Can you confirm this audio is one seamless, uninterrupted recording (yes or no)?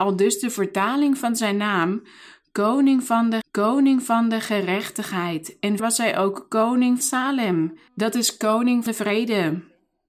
no